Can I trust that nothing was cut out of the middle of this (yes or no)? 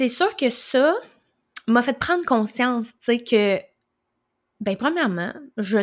yes